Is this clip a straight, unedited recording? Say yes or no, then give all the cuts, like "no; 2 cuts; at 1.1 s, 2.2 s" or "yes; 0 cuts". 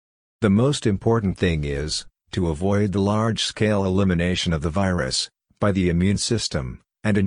yes; 0 cuts